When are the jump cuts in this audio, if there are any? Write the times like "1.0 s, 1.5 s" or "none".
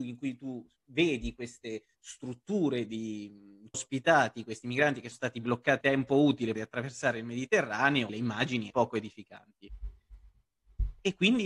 1.9 s, 3.7 s, 5.1 s, 5.8 s, 6.5 s, 8.1 s, 8.7 s